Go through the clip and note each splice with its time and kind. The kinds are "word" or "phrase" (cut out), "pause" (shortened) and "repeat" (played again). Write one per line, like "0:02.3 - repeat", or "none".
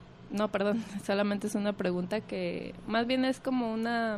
none